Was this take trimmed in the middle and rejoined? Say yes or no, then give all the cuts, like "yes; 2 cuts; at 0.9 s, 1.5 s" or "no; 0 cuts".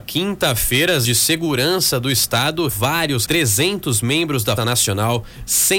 yes; 4 cuts; at 1.0 s, 2.7 s, 3.3 s, 4.6 s